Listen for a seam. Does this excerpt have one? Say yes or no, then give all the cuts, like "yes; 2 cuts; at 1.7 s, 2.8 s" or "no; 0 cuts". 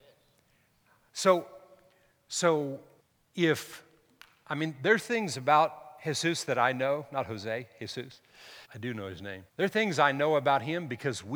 yes; 3 cuts; at 3.0 s, 8.6 s, 9.5 s